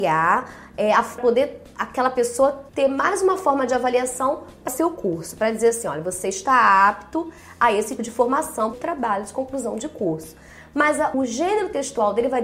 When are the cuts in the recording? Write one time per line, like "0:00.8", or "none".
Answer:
0:01.2
0:02.7
0:04.7
0:08.0
0:08.7
0:11.1